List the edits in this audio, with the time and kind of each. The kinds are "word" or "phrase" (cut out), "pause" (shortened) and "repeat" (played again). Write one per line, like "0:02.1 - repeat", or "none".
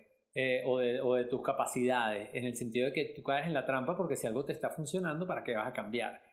none

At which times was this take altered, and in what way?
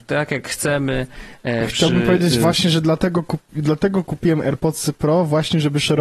none

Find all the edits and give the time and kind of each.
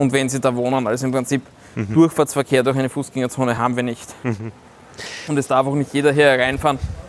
none

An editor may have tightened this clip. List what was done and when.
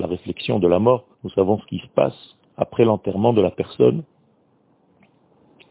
0:01.1 - pause
0:02.4 - pause

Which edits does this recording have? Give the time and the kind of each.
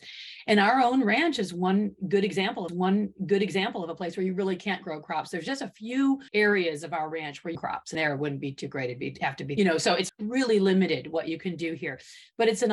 0:02.7 - repeat
0:06.3 - pause
0:07.5 - phrase
0:07.9 - word
0:09.6 - phrase
0:10.1 - word

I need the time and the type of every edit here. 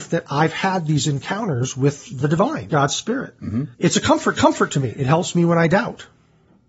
0:02.7 - word
0:03.7 - pause
0:04.3 - repeat

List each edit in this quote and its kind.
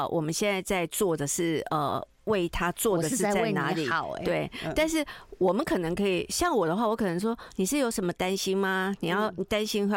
none

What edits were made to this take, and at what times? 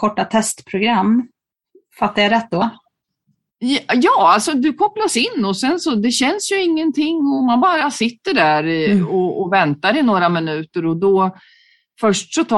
none

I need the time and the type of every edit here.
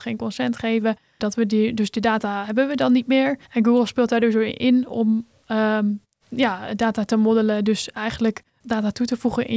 0:03.5 - pause
0:08.5 - pause

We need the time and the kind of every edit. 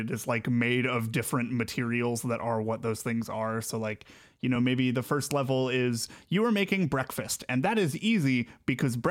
none

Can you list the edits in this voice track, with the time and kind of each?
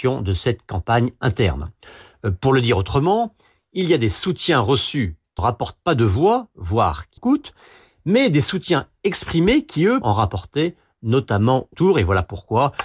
0:05.4 - word
0:07.2 - word
0:10.0 - word
0:11.7 - word

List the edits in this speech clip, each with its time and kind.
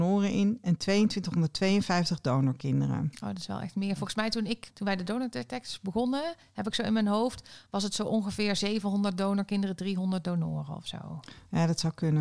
0:04.7 - word

